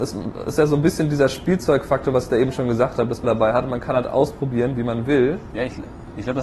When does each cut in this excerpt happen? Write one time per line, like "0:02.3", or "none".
0:03.2